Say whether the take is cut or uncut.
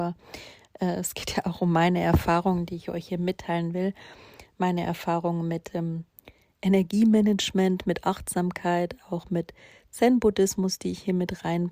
uncut